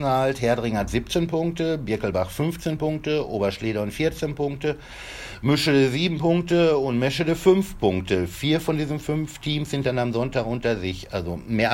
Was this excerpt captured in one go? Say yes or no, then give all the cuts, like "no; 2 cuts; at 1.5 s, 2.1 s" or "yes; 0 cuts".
yes; 0 cuts